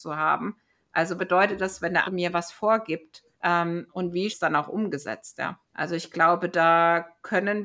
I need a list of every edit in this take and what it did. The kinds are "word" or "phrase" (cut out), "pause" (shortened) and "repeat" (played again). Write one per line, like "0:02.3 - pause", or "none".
0:01.2 - word
0:02.0 - word
0:03.3 - pause
0:04.3 - phrase
0:05.7 - pause